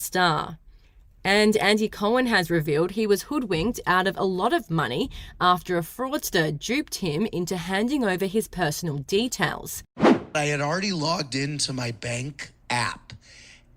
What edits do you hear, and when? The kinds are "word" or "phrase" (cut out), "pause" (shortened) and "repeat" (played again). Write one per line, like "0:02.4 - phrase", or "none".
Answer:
none

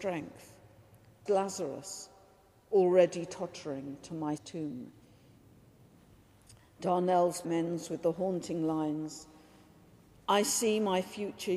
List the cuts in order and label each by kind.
0:01.3 - word
0:04.4 - word
0:07.4 - word

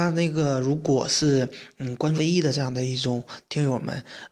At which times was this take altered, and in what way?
0:02.2 - word

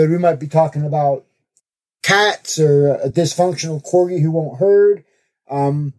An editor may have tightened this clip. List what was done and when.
none

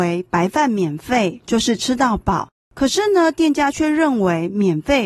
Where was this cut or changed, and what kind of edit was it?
0:02.6 - pause

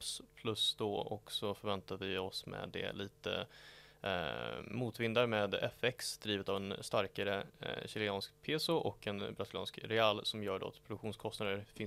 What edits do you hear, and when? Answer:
none

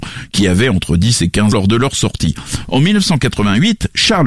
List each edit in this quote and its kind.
0:01.5 - word

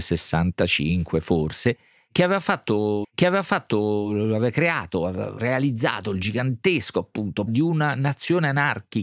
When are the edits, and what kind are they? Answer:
0:03.0 - repeat
0:07.5 - word

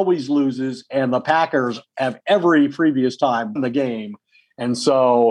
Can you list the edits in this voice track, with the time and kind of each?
0:03.6 - word

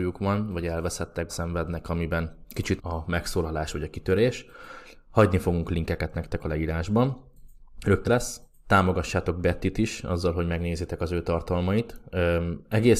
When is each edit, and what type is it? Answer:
0:01.3 - word
0:01.8 - phrase
0:02.8 - word
0:08.1 - phrase

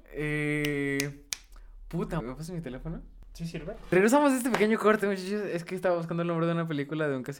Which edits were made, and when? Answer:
0:02.2 - word

